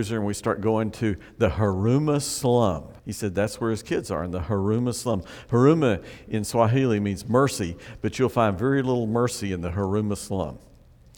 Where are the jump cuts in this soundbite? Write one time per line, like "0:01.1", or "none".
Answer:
0:03.0